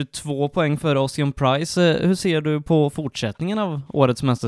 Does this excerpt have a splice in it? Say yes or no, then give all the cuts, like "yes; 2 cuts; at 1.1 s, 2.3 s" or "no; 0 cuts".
no; 0 cuts